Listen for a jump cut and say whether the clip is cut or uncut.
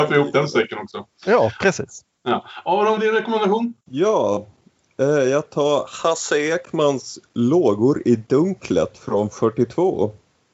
cut